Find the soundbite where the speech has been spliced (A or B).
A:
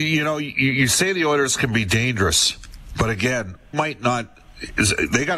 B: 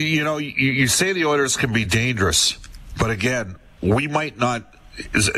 A